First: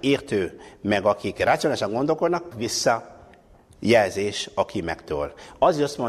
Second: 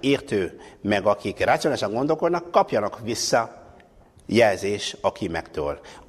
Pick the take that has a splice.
first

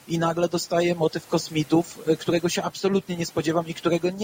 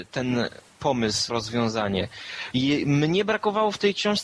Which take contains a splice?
second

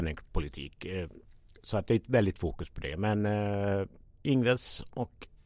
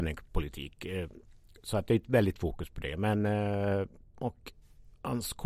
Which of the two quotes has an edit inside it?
second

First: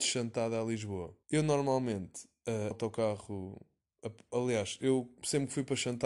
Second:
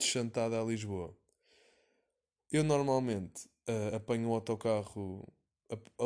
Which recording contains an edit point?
first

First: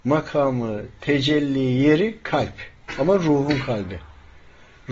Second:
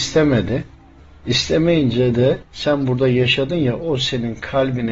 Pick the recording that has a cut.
second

